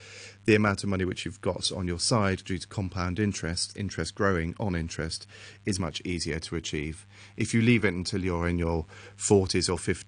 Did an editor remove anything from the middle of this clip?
yes; 2 cuts; at 3.7 s, 5.8 s

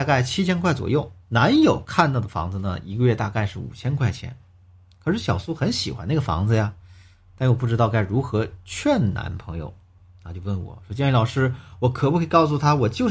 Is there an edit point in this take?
yes; 1 cut; at 1.2 s

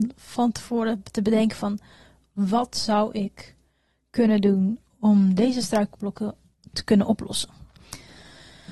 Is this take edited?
no; 0 cuts

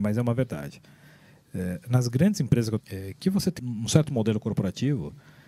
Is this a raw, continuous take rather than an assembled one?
no; 2 cuts; at 2.8 s, 3.6 s

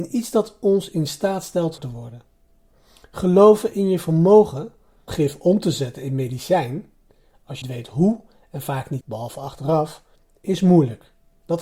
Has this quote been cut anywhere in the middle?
yes; 4 cuts; at 1.8 s, 5.1 s, 7.6 s, 9.0 s

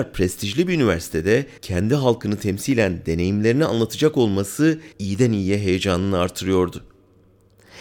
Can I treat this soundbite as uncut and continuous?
no; 2 cuts; at 1.6 s, 4.9 s

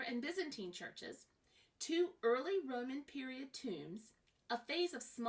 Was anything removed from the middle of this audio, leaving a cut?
no; 0 cuts

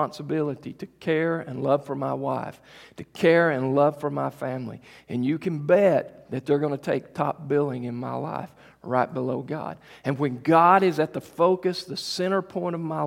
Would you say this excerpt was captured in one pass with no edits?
yes; 0 cuts

